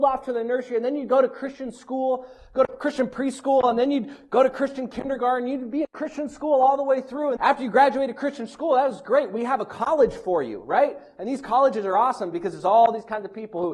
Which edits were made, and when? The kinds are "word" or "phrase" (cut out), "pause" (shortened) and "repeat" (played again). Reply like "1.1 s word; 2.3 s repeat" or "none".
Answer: 7.4 s word

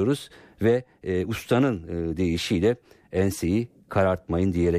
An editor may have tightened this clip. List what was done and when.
none

